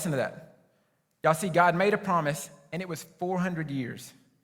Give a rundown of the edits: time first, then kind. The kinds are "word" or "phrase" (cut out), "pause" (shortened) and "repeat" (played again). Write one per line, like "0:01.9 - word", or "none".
none